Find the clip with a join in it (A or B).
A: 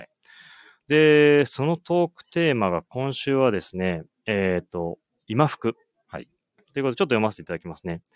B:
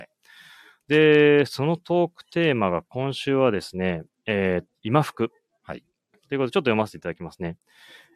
B